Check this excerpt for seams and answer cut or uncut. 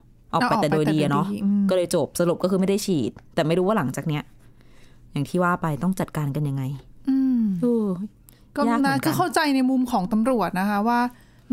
uncut